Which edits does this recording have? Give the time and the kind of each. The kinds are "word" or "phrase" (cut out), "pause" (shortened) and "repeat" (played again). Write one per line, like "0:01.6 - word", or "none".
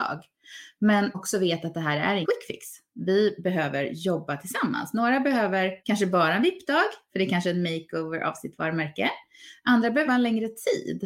0:01.1 - word
0:02.2 - word
0:05.8 - pause
0:10.1 - word